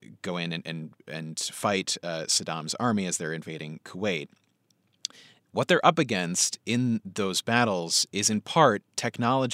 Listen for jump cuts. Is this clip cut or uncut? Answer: uncut